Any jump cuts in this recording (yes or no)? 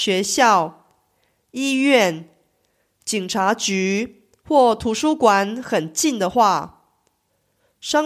no